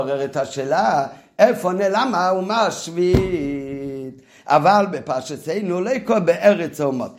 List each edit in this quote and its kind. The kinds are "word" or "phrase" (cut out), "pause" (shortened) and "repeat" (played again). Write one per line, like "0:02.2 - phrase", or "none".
none